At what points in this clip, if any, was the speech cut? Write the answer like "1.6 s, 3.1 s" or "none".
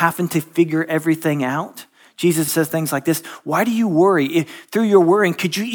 2.5 s